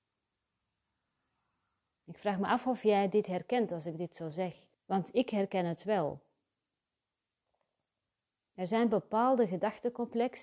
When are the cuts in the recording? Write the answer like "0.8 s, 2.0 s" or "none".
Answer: 4.7 s